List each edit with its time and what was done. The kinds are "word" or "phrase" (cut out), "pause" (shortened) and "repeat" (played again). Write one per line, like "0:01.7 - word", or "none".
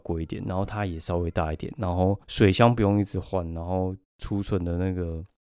0:02.2 - pause
0:04.0 - pause